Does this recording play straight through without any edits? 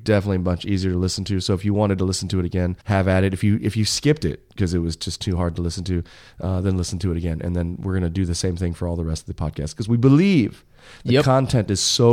no; 1 cut; at 2.8 s

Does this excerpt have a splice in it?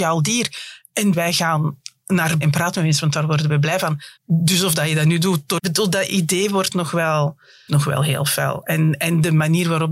yes; 5 cuts; at 1.1 s, 2.4 s, 4.2 s, 5.6 s, 7.7 s

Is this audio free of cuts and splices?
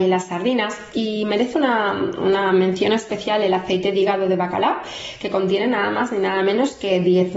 yes; 0 cuts

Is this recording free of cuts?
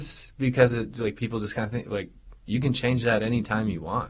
yes; 0 cuts

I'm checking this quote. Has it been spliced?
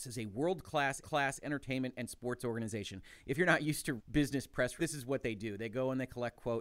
yes; 3 cuts; at 1.0 s, 4.0 s, 4.8 s

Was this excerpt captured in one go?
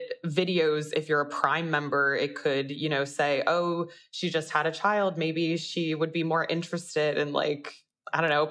yes; 0 cuts

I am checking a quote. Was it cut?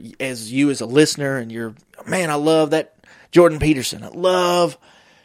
no; 0 cuts

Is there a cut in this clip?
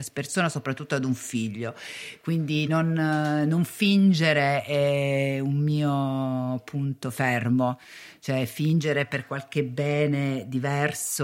no; 0 cuts

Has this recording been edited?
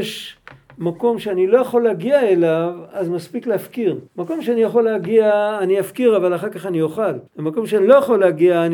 yes; 2 cuts; at 4.1 s, 7.3 s

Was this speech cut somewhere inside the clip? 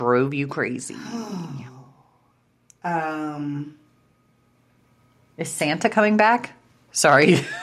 no; 0 cuts

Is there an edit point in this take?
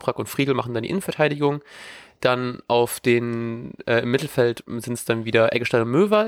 no; 0 cuts

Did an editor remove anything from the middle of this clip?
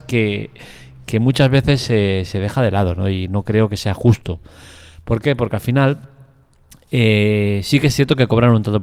no; 0 cuts

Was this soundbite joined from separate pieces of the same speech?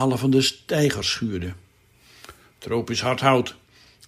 no; 0 cuts

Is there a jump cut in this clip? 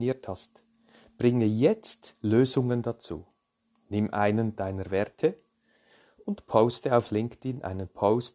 no; 0 cuts

